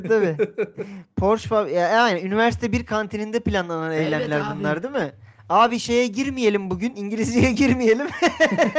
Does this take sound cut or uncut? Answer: uncut